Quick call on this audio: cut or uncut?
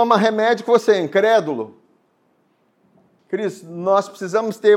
uncut